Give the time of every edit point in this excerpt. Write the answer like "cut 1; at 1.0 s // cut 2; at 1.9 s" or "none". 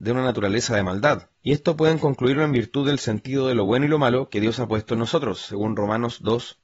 none